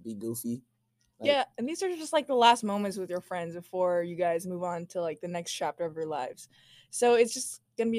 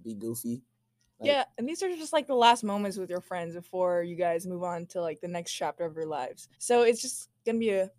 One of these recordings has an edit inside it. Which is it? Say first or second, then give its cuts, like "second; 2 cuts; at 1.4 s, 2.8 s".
second; 1 cut; at 6.5 s